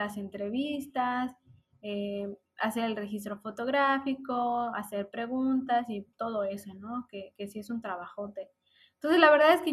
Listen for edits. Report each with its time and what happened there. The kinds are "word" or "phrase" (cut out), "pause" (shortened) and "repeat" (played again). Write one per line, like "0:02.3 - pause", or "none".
0:06.1 - pause